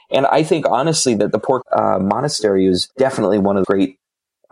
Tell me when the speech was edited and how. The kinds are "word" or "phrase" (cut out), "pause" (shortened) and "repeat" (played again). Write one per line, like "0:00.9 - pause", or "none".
0:01.6 - word
0:02.9 - pause
0:03.6 - word